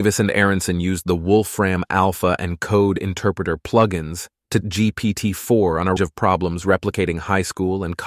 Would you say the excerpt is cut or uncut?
cut